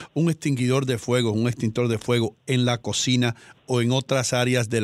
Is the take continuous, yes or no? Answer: yes